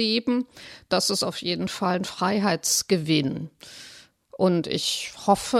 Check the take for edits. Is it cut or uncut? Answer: uncut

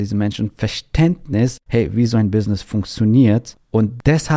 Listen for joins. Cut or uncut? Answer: cut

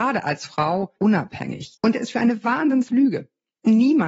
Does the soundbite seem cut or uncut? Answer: cut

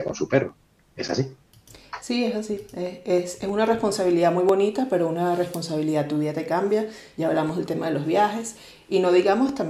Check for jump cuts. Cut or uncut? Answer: uncut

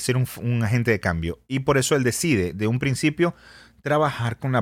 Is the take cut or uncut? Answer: uncut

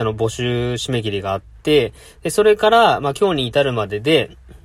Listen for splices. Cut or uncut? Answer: uncut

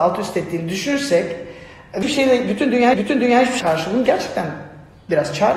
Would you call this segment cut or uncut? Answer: cut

